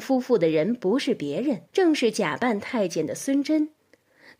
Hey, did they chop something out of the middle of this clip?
yes; 1 cut; at 1.7 s

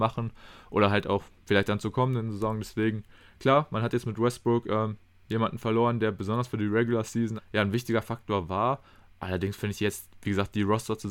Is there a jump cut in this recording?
yes; 1 cut; at 7.4 s

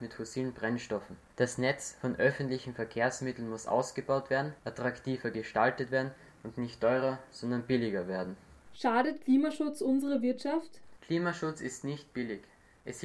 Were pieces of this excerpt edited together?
no; 0 cuts

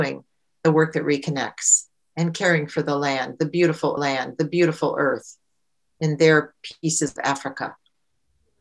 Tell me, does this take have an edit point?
yes; 2 cuts; at 4.0 s, 7.2 s

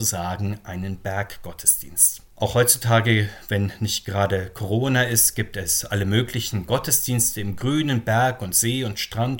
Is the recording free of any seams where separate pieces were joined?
no; 1 cut; at 2.3 s

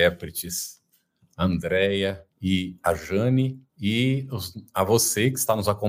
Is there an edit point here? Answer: yes; 2 cuts; at 2.3 s, 3.7 s

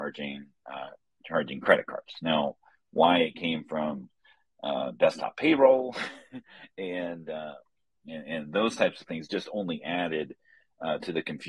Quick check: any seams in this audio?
no; 0 cuts

